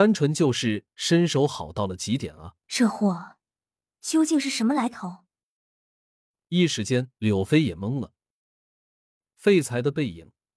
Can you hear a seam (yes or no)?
yes